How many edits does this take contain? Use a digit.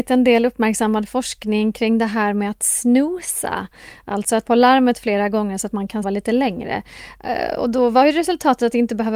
2